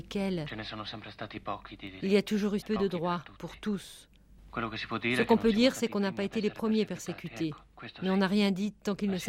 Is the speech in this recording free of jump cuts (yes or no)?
no